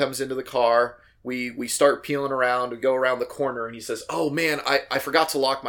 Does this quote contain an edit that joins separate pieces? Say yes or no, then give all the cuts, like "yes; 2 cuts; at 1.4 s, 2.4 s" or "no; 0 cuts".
no; 0 cuts